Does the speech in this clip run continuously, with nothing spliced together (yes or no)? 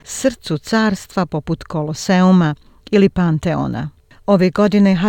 yes